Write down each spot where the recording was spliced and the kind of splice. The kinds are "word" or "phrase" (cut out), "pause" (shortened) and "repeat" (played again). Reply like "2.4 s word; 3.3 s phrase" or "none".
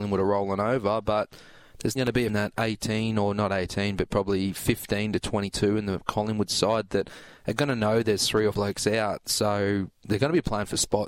2.0 s word; 2.3 s phrase; 8.5 s word